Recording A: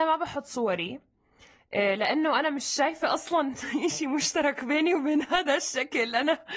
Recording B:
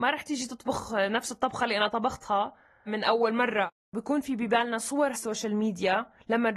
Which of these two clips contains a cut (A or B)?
B